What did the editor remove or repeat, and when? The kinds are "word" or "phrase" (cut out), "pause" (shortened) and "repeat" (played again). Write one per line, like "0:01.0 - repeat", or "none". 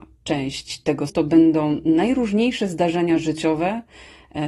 0:01.1 - word